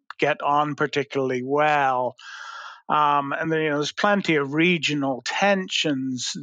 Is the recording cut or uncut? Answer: uncut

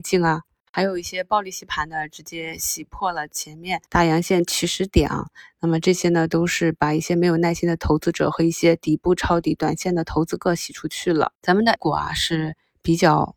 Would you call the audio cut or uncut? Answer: cut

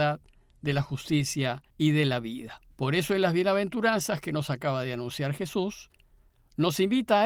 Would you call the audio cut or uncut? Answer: cut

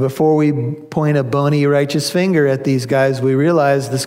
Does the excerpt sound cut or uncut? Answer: uncut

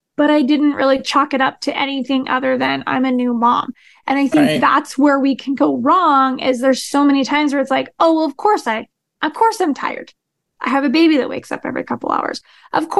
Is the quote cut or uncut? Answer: uncut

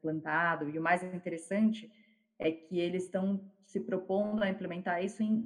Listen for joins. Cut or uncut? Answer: uncut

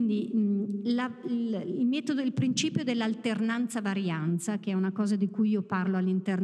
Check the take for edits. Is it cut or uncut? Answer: uncut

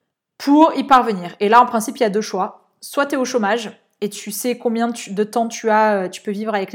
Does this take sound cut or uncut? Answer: uncut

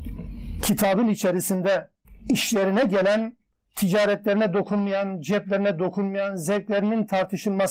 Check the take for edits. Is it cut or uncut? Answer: uncut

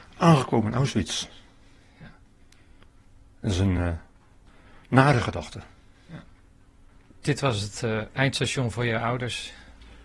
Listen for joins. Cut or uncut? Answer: uncut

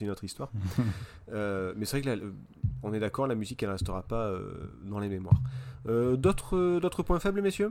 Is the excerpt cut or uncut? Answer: uncut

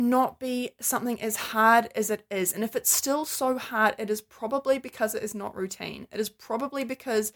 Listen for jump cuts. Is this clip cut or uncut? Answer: uncut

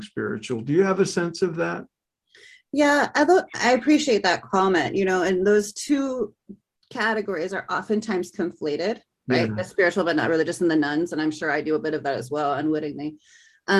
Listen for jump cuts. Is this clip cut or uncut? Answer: uncut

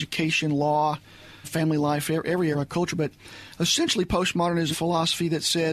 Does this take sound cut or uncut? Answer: cut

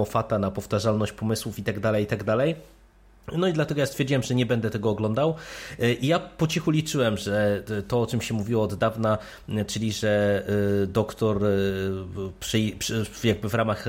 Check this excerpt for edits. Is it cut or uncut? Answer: uncut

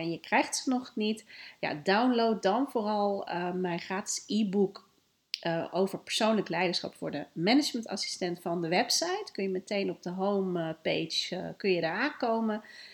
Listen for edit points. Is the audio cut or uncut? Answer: uncut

